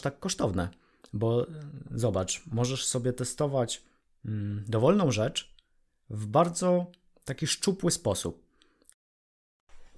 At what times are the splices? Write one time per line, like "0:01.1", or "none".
none